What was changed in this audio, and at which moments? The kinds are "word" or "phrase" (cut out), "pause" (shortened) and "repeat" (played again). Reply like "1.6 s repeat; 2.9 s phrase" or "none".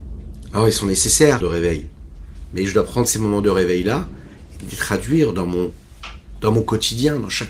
1.4 s phrase